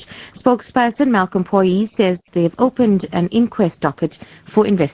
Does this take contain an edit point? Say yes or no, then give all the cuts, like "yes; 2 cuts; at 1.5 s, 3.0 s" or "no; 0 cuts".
no; 0 cuts